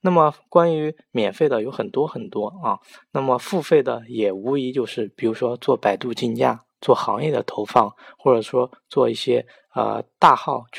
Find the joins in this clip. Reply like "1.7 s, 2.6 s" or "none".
none